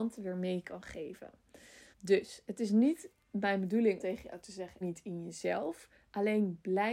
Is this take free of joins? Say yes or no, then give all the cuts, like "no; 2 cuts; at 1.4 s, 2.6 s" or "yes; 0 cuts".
no; 4 cuts; at 1.9 s, 3.2 s, 4.0 s, 4.8 s